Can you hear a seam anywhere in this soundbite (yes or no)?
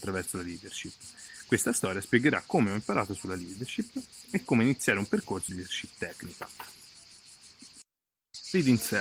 yes